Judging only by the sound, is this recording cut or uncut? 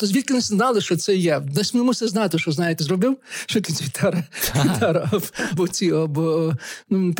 cut